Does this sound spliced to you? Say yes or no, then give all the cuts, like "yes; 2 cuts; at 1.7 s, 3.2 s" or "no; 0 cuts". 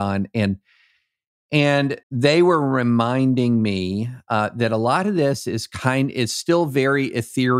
yes; 1 cut; at 2.0 s